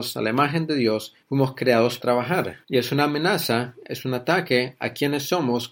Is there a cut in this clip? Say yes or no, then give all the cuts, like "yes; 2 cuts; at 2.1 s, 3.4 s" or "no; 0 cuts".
yes; 3 cuts; at 1.2 s, 2.0 s, 2.6 s